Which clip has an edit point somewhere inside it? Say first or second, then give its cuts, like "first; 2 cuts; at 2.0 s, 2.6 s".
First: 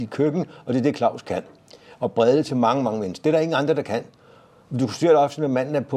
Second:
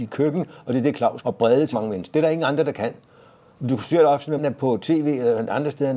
second; 3 cuts; at 1.2 s, 1.7 s, 4.4 s